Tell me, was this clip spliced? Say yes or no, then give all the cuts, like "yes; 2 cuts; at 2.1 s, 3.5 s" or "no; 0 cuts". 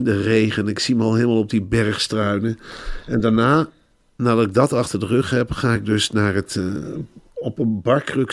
no; 0 cuts